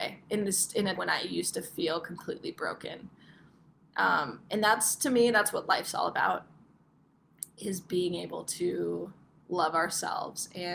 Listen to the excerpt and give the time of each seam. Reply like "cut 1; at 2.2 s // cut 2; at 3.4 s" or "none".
cut 1; at 1.0 s